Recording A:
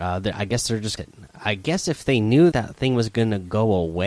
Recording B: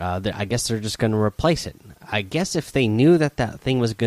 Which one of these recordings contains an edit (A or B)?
A